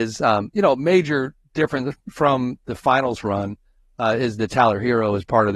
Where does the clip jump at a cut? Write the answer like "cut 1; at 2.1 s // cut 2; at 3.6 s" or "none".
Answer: none